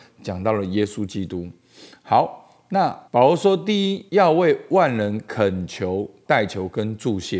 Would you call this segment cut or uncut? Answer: cut